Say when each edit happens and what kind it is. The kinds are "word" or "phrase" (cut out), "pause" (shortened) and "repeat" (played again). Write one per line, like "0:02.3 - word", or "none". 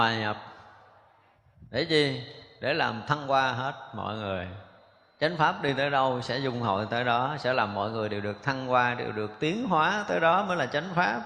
none